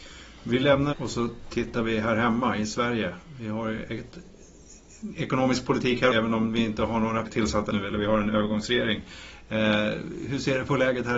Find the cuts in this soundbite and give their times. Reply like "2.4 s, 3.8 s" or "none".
0.9 s, 6.1 s, 7.2 s, 7.7 s